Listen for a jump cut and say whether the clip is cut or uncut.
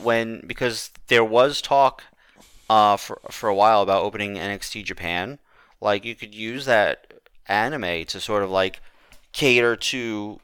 uncut